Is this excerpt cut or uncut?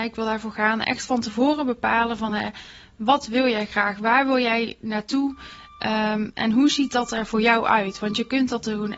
uncut